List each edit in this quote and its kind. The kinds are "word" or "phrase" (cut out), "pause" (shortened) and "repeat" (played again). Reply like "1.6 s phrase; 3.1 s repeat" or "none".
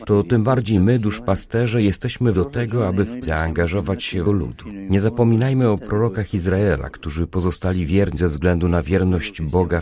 2.3 s word; 3.2 s word; 4.3 s phrase; 8.2 s word